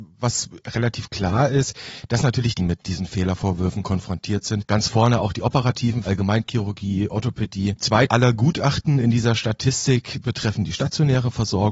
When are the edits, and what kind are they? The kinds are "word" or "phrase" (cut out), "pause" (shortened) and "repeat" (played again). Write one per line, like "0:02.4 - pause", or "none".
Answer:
0:02.6 - phrase
0:06.0 - word
0:07.1 - word
0:08.1 - word